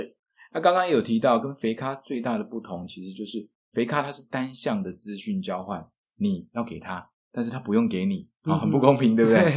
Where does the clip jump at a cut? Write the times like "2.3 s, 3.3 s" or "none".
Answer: 6.0 s